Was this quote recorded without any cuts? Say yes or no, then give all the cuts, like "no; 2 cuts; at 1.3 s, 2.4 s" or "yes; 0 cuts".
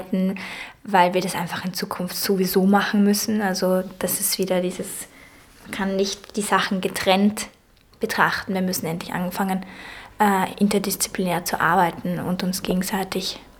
yes; 0 cuts